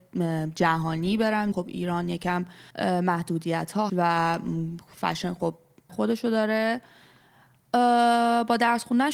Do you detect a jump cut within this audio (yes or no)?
yes